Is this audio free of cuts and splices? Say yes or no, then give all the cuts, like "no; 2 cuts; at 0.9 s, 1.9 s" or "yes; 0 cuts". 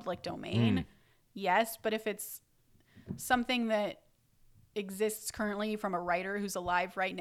yes; 0 cuts